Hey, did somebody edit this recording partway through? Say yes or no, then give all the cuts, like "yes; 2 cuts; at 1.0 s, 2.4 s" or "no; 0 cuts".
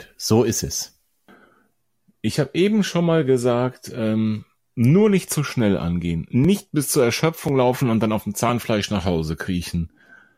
no; 0 cuts